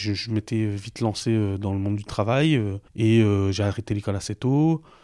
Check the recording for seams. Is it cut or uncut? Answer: cut